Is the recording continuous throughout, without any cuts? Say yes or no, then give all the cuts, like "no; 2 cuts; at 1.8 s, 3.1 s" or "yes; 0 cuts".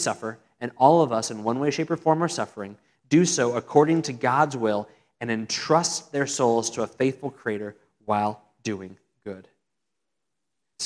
yes; 0 cuts